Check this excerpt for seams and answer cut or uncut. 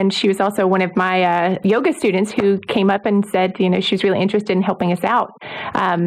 uncut